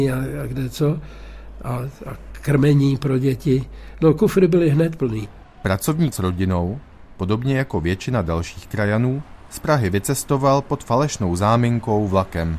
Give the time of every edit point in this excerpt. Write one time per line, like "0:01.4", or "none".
0:06.1